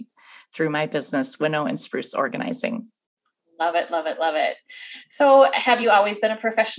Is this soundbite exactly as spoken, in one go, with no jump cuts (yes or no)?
yes